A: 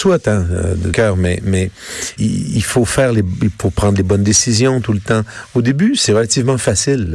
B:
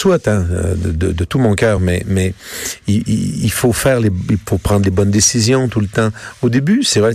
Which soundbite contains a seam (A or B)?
A